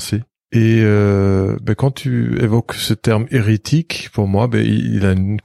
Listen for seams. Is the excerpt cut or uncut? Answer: uncut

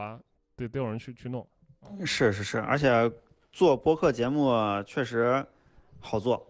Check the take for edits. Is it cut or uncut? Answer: uncut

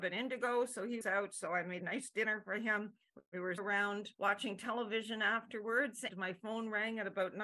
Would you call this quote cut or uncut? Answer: cut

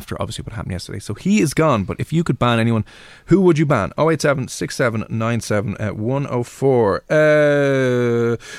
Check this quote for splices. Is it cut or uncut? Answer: uncut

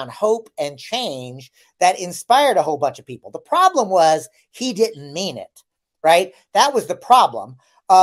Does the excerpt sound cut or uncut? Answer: uncut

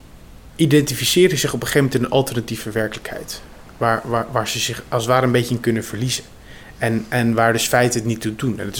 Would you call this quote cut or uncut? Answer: uncut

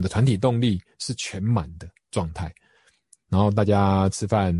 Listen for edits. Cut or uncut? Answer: uncut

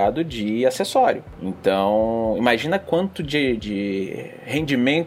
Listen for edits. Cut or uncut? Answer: cut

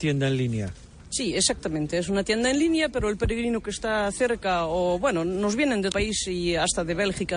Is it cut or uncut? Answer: cut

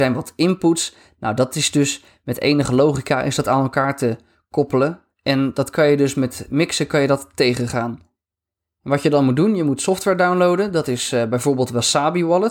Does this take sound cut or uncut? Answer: uncut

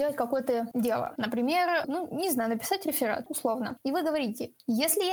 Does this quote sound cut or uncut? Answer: uncut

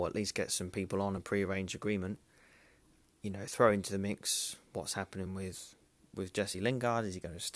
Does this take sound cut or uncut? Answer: uncut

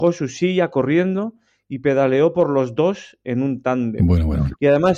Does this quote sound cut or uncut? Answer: uncut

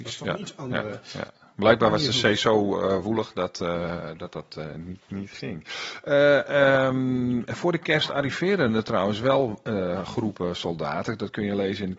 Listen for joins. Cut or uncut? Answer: uncut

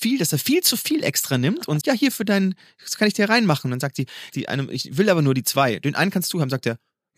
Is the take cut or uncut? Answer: cut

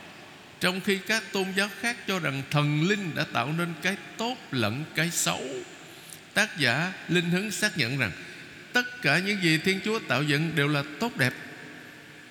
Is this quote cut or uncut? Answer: uncut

